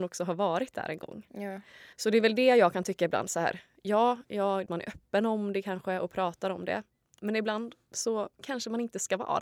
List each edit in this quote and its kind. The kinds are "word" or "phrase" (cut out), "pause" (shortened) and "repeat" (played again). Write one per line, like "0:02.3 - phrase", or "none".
0:01.9 - pause
0:04.7 - phrase

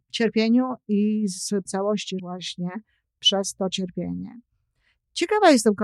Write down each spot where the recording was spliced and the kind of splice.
0:01.7 - word
0:02.2 - word

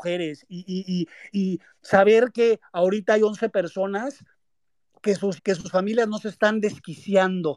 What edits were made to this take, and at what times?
0:01.3 - word
0:05.4 - word

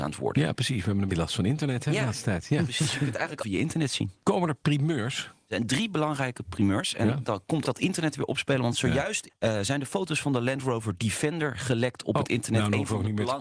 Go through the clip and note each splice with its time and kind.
0:01.1 - word
0:03.4 - phrase
0:07.6 - word

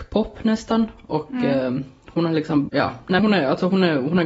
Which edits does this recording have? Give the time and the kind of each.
0:02.7 - word
0:03.2 - word

